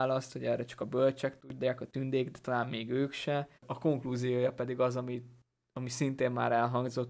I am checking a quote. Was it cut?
yes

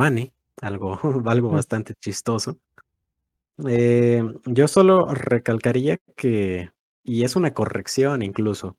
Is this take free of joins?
yes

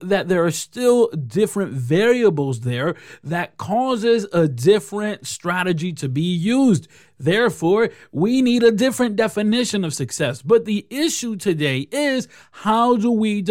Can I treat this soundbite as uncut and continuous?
yes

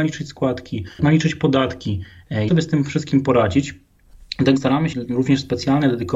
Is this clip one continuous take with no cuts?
no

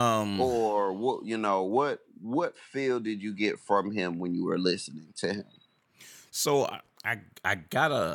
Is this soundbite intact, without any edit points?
yes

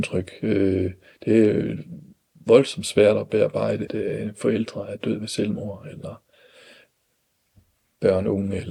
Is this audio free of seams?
no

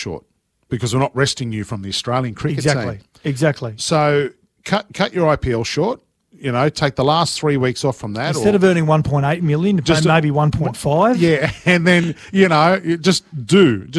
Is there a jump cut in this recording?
no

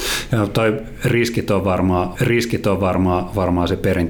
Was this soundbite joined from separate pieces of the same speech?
yes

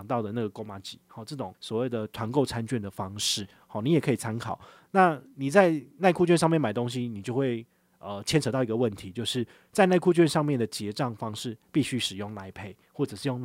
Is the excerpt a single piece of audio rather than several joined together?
yes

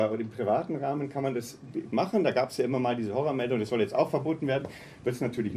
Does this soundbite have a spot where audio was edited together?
yes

